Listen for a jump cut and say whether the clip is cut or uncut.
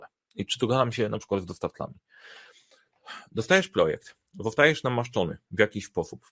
uncut